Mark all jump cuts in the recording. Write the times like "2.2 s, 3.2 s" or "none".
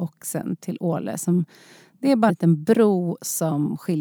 2.3 s